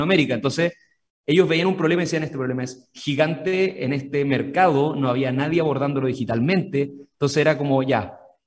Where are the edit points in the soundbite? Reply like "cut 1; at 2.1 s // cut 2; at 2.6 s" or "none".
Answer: none

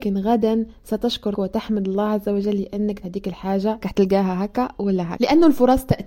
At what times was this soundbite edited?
cut 1; at 1.3 s // cut 2; at 3.0 s // cut 3; at 3.8 s // cut 4; at 5.2 s

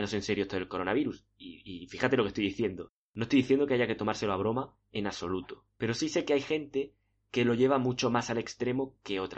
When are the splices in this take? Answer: none

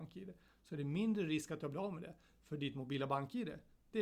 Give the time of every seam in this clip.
none

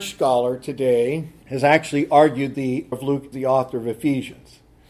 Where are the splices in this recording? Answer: cut 1; at 1.4 s // cut 2; at 2.5 s // cut 3; at 2.9 s // cut 4; at 3.3 s

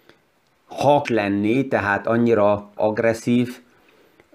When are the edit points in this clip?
cut 1; at 1.0 s // cut 2; at 2.8 s

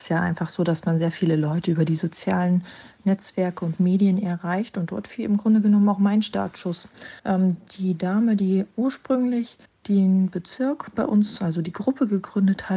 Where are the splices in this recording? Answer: cut 1; at 7.2 s // cut 2; at 9.7 s

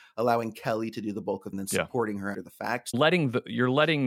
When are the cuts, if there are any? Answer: cut 1; at 1.5 s // cut 2; at 2.3 s // cut 3; at 2.9 s

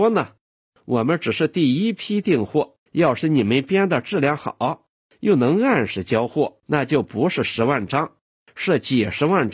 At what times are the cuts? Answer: cut 1; at 2.9 s // cut 2; at 6.6 s

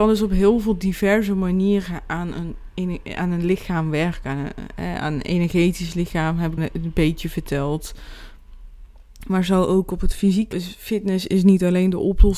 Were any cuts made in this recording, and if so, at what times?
cut 1; at 6.6 s // cut 2; at 10.5 s

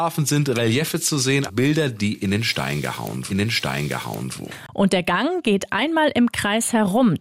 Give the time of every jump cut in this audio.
cut 1; at 1.5 s // cut 2; at 3.3 s

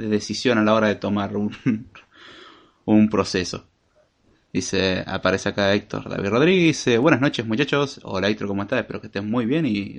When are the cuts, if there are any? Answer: none

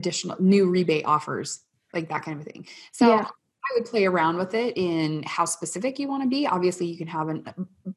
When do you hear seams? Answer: none

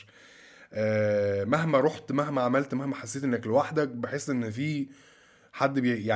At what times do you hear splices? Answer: none

